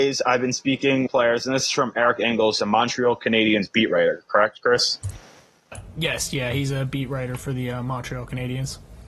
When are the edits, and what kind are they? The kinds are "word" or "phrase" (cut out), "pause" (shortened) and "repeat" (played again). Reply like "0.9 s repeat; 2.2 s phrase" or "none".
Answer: 1.1 s word; 2.6 s word